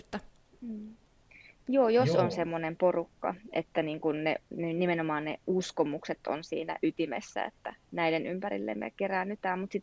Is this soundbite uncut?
yes; 0 cuts

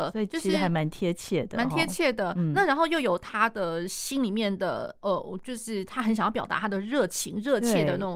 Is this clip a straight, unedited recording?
yes; 0 cuts

